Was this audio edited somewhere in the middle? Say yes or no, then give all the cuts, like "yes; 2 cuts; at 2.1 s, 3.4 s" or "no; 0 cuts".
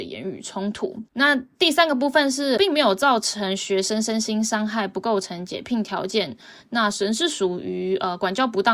yes; 2 cuts; at 1.1 s, 2.6 s